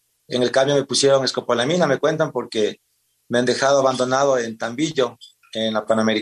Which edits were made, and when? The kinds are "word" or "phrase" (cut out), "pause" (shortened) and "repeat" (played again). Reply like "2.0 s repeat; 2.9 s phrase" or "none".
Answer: none